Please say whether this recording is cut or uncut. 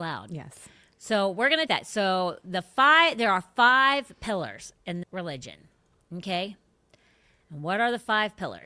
cut